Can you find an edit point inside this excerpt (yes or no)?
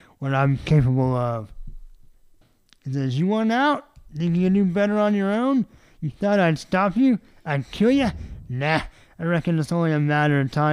no